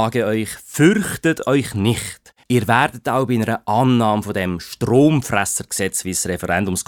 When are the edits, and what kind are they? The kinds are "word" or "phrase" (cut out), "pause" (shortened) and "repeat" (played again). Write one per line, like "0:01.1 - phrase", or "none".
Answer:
0:02.4 - pause

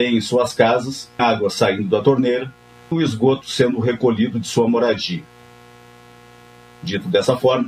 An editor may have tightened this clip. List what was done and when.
0:01.2 - word
0:02.9 - word

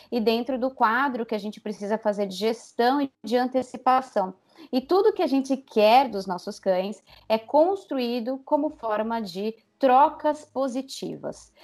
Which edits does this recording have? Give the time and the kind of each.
none

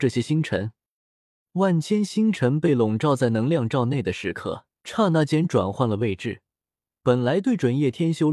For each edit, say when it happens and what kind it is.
0:04.7 - pause

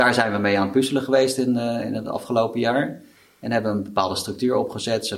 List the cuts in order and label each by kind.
none

